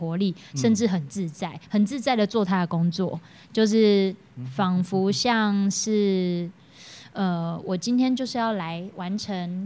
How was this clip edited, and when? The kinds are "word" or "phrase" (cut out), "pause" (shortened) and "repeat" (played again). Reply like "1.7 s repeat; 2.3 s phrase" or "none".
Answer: none